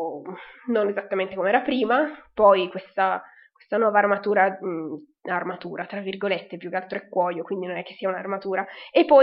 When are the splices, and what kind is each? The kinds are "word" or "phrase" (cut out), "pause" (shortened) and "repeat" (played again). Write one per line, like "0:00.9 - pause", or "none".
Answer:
none